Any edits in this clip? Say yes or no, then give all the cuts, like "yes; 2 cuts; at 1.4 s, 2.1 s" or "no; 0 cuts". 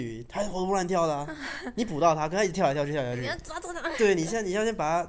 no; 0 cuts